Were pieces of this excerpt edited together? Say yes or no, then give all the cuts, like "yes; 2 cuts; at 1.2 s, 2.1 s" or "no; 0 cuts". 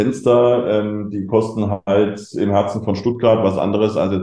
no; 0 cuts